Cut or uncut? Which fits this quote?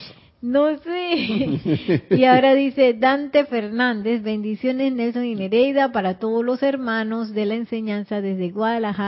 uncut